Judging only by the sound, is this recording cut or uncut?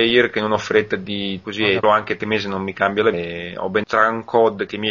cut